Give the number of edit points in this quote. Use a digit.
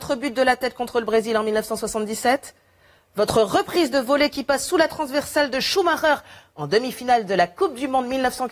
0